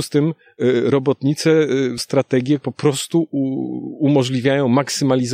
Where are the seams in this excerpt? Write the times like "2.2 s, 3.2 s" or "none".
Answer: 2.0 s, 2.6 s